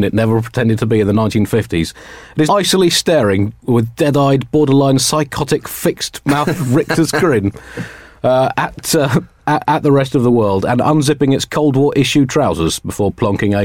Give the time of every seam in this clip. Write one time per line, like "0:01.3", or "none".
0:02.5